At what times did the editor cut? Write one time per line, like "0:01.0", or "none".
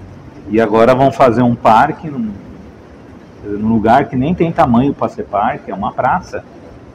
none